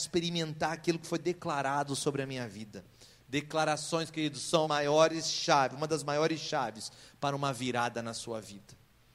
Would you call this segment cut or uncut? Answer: cut